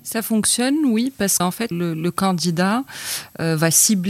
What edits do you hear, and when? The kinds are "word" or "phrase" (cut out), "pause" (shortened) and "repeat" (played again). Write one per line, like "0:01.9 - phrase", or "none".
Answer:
0:01.4 - word
0:01.7 - word